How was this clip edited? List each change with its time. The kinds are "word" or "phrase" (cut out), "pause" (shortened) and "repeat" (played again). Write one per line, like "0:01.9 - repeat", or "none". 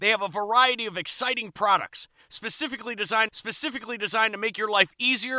0:03.3 - repeat

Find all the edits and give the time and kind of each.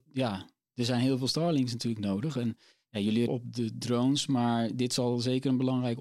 0:03.3 - phrase

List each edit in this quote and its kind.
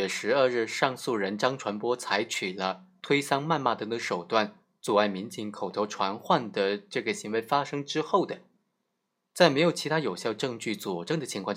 none

